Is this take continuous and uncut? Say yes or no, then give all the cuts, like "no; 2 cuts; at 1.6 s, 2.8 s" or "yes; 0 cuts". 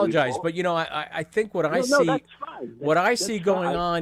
yes; 0 cuts